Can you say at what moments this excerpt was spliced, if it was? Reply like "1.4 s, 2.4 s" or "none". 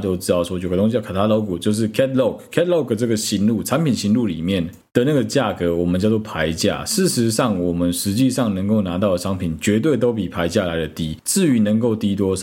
none

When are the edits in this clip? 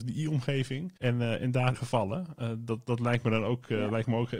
1.0 s, 1.8 s

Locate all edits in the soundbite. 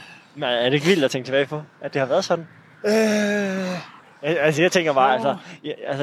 4.0 s

